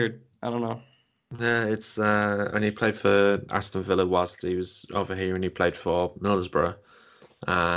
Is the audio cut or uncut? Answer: cut